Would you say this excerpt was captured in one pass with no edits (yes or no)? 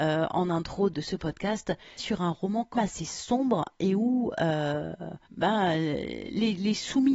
no